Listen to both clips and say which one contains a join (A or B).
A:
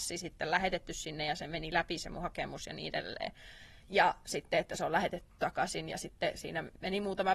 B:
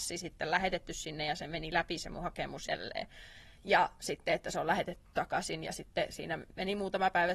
B